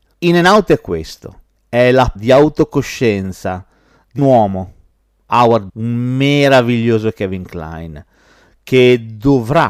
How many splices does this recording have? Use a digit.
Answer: 3